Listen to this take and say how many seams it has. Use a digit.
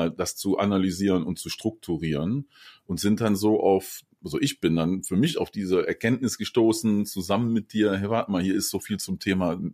0